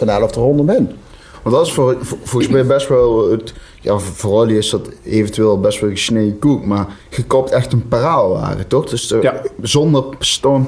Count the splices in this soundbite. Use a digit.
1